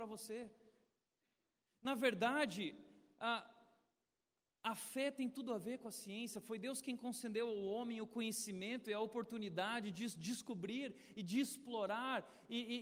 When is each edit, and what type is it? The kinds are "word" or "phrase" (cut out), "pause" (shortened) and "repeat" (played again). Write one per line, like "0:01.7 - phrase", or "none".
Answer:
none